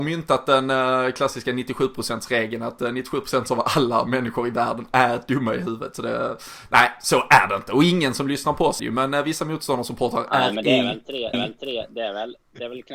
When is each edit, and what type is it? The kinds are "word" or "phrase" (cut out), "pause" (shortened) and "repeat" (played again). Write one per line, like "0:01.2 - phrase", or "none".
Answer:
0:08.8 - word
0:11.3 - repeat